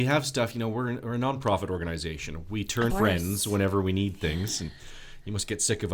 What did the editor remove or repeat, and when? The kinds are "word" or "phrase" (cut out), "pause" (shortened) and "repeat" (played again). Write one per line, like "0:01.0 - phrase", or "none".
0:02.9 - phrase